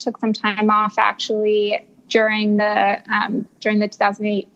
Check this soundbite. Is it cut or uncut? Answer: uncut